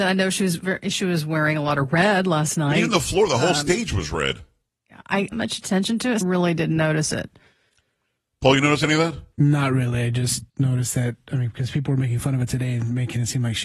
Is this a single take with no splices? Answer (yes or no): no